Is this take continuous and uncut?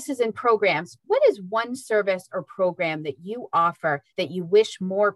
no; 2 cuts; at 1.0 s, 4.1 s

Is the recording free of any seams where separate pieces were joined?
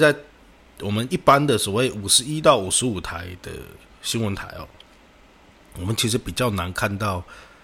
yes; 0 cuts

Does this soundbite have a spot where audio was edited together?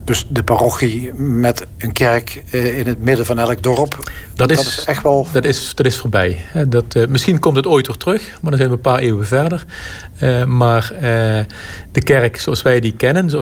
no; 0 cuts

